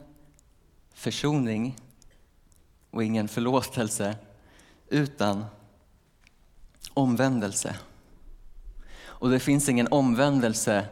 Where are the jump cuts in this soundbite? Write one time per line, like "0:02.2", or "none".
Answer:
none